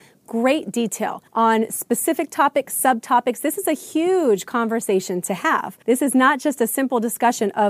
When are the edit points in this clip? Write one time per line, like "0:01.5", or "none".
0:01.3
0:05.8